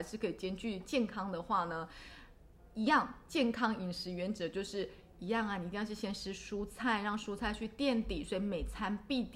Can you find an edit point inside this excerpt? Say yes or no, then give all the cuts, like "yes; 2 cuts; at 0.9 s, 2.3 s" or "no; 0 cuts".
no; 0 cuts